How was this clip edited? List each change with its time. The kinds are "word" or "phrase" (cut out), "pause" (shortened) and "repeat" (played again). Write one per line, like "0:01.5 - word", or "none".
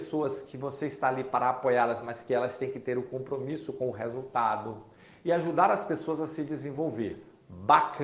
none